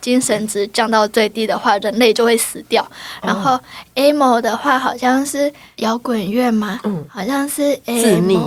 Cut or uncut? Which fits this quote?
uncut